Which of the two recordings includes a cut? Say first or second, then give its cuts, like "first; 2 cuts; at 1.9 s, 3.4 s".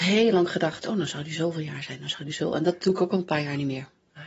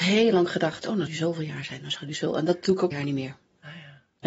second; 2 cuts; at 1.1 s, 2.9 s